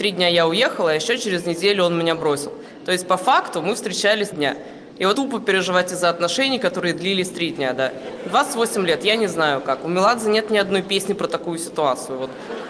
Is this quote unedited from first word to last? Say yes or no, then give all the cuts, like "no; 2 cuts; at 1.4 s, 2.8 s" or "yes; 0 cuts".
no; 2 cuts; at 4.3 s, 5.1 s